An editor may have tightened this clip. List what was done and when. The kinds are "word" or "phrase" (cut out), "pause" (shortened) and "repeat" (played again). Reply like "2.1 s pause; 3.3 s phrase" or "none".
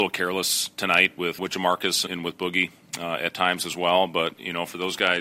1.4 s word; 2.1 s word